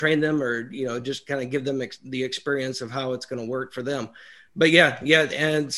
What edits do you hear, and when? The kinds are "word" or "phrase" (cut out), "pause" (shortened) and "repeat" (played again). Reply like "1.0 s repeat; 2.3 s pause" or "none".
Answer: none

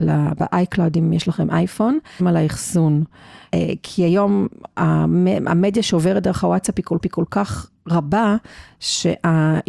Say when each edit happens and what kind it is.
2.2 s phrase; 7.0 s repeat

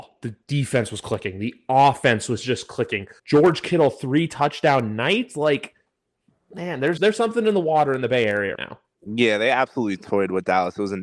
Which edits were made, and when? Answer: 3.2 s pause; 7.0 s word; 8.5 s word

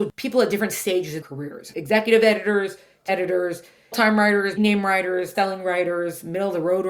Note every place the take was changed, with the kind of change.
1.2 s word; 1.7 s word; 3.1 s word; 3.9 s word; 4.6 s word; 5.3 s word

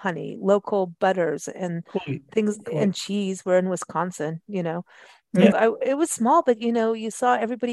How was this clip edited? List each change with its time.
5.5 s word

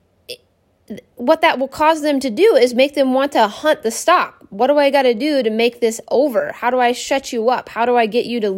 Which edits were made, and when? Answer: none

